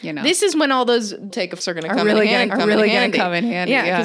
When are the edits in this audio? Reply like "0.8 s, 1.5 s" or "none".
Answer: 1.3 s, 1.6 s, 2.5 s